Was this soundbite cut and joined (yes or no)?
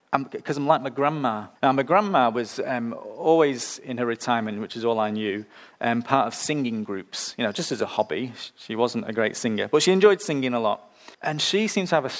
yes